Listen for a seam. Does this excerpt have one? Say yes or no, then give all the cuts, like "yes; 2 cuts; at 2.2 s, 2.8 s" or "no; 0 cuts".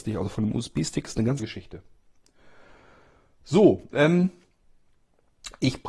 yes; 1 cut; at 1.4 s